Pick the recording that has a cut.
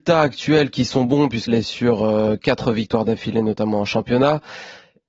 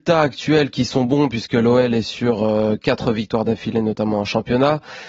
first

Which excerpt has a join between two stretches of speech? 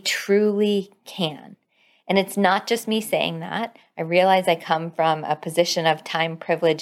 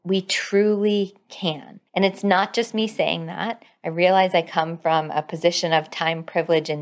second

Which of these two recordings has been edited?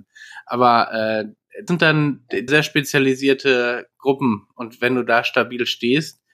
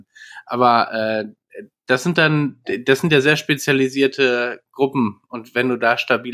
first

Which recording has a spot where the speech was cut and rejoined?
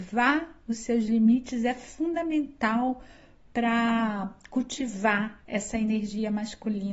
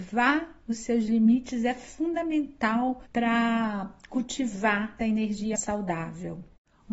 second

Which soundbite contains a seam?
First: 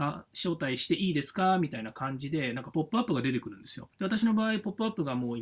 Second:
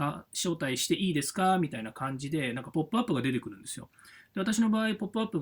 first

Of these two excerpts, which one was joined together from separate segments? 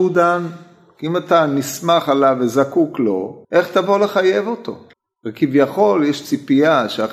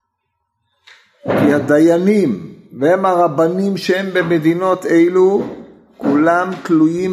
first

